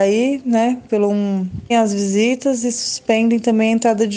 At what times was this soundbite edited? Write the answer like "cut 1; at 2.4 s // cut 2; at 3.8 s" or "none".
cut 1; at 1.7 s